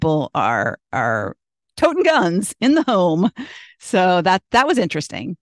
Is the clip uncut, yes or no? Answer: yes